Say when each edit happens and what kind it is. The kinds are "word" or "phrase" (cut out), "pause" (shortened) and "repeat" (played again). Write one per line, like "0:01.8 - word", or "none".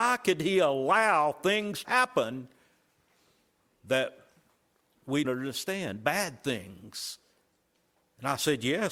0:01.8 - word
0:05.2 - word